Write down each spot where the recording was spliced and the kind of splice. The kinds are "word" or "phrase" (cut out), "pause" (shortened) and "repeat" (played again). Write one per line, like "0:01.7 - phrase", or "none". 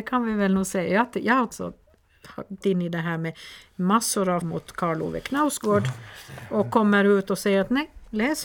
0:01.5 - word
0:02.6 - word
0:04.4 - word